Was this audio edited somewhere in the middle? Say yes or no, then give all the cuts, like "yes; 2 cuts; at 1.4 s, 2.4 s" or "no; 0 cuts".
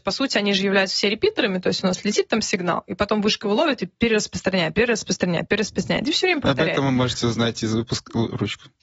no; 0 cuts